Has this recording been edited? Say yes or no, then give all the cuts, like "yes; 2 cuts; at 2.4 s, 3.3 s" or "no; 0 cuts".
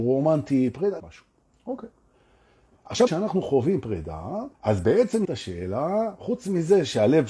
yes; 4 cuts; at 1.0 s, 3.1 s, 4.5 s, 5.2 s